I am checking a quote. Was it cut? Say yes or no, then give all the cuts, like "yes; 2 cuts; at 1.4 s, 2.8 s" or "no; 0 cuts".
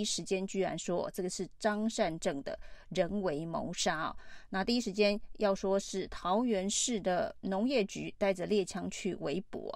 no; 0 cuts